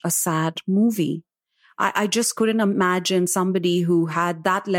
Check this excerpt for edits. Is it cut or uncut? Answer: uncut